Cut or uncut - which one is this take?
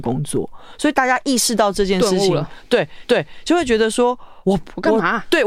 cut